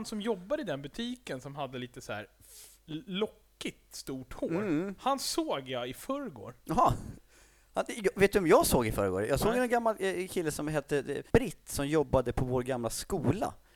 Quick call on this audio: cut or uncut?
cut